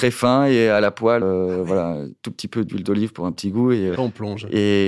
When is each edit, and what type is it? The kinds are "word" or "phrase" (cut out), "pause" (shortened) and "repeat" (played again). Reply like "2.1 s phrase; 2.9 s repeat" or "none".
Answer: 1.2 s word; 4.0 s word